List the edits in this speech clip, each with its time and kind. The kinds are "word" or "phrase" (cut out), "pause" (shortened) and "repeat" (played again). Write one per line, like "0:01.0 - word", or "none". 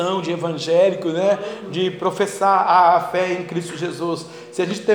none